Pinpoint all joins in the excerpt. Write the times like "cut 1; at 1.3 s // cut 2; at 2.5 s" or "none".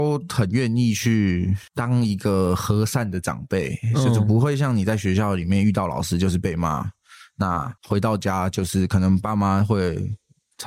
cut 1; at 1.7 s // cut 2; at 7.8 s